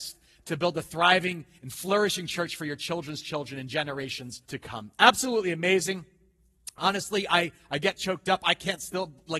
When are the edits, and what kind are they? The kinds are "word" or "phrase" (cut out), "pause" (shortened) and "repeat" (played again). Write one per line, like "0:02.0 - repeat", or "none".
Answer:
0:04.4 - pause